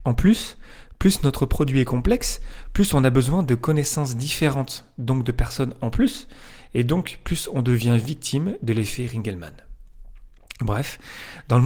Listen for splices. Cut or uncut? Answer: uncut